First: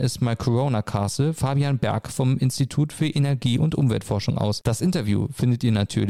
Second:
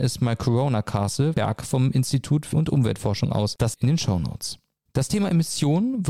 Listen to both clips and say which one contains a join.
second; 4 cuts; at 1.3 s, 2.5 s, 3.7 s, 4.9 s

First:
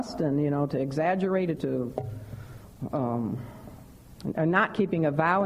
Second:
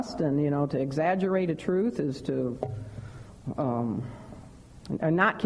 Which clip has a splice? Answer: first; 1 cut; at 1.6 s

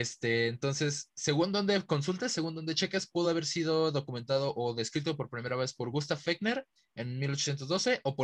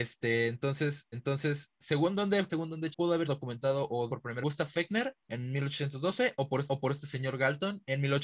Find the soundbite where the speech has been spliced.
second; 8 cuts; at 1.1 s, 2.5 s, 2.9 s, 3.3 s, 4.1 s, 4.4 s, 5.2 s, 6.7 s

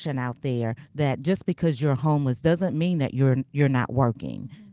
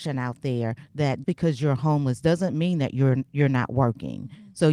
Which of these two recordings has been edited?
second; 1 cut; at 1.2 s

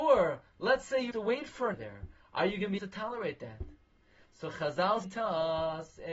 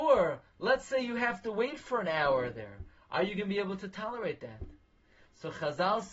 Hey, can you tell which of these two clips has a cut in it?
first; 4 cuts; at 1.1 s, 1.7 s, 2.8 s, 5.0 s

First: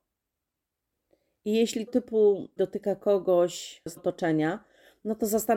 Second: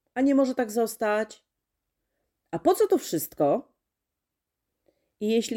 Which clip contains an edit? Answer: first; 3 cuts; at 1.9 s, 2.6 s, 4.0 s

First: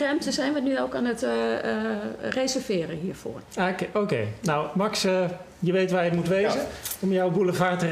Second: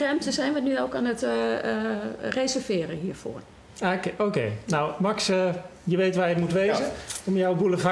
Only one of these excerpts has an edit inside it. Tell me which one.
first; 1 cut; at 3.5 s

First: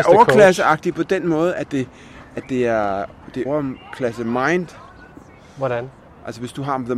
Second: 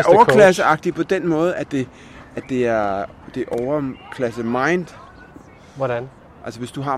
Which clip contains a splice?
first; 1 cut; at 3.5 s

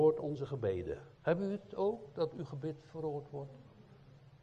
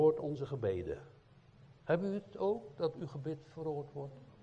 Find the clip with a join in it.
first; 1 cut; at 1.1 s

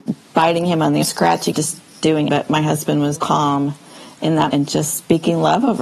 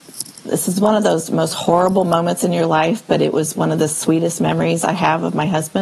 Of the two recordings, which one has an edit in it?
first; 5 cuts; at 1.0 s, 1.5 s, 2.3 s, 3.2 s, 4.5 s

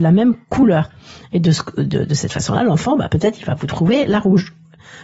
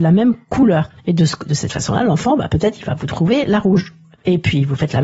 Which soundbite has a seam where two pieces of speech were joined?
second; 3 cuts; at 1.0 s, 1.4 s, 4.1 s

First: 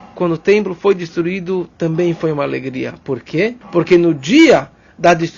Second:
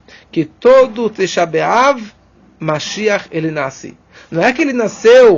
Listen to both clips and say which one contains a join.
first; 1 cut; at 3.6 s

